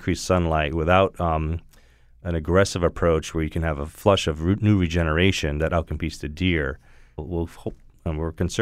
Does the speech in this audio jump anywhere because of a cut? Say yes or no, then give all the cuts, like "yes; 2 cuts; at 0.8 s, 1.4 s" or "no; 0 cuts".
yes; 1 cut; at 7.2 s